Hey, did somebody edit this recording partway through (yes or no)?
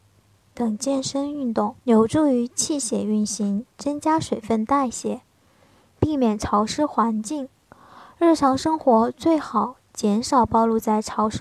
yes